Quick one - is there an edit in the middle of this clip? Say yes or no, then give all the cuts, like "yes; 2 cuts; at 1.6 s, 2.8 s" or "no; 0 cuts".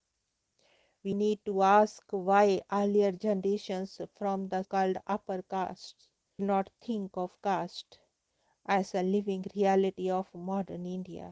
yes; 3 cuts; at 1.1 s, 4.6 s, 6.4 s